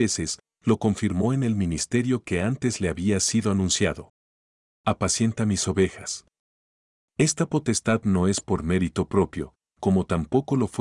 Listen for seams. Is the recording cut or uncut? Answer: uncut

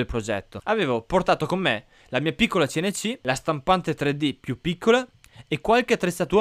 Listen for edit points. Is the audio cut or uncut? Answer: uncut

